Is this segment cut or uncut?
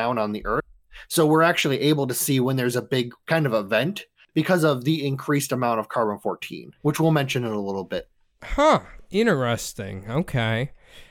uncut